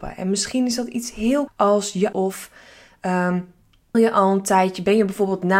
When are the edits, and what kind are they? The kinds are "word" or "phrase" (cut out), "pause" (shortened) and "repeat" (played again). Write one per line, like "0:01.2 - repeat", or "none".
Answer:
0:01.5 - word
0:02.1 - word
0:03.9 - word